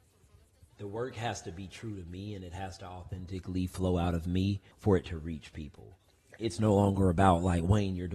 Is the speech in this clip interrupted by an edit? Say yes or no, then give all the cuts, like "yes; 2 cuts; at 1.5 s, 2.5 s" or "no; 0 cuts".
yes; 2 cuts; at 4.7 s, 6.1 s